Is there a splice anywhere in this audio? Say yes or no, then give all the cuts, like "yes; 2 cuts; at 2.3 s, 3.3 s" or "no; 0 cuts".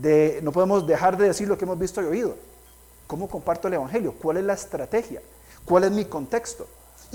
no; 0 cuts